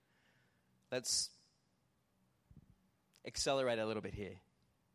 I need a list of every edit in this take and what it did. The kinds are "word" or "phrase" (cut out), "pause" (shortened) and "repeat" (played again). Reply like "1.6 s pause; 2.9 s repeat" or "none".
none